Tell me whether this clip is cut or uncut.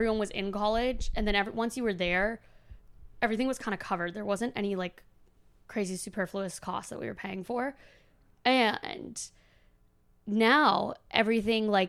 uncut